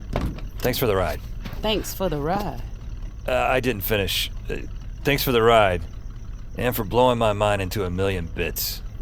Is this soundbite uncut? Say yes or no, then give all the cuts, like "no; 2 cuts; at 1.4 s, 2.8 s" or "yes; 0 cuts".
yes; 0 cuts